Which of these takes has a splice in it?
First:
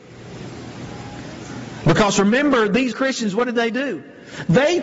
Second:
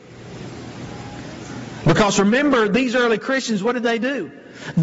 first; 1 cut; at 2.9 s

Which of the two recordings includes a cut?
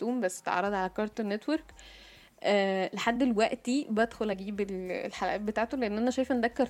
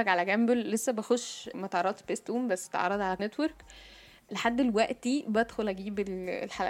second; 4 cuts; at 1.5 s, 2.0 s, 3.2 s, 4.3 s

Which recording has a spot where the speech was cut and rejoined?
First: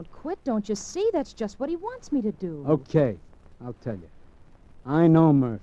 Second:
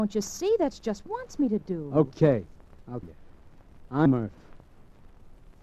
second; 3 cuts; at 1.1 s, 3.0 s, 4.1 s

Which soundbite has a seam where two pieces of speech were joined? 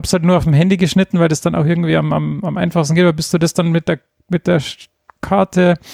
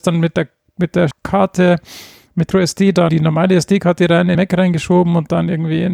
second; 4 cuts; at 1.1 s, 2.5 s, 3.1 s, 4.3 s

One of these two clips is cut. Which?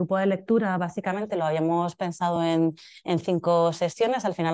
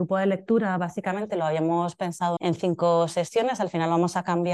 second; 1 cut; at 2.4 s

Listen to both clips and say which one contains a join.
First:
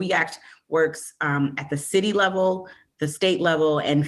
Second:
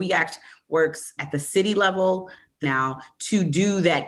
second; 2 cuts; at 1.2 s, 2.6 s

